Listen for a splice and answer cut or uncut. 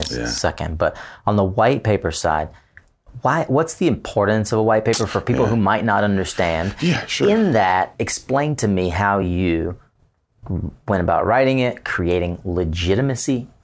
uncut